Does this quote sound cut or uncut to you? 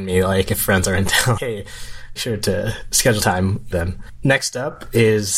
cut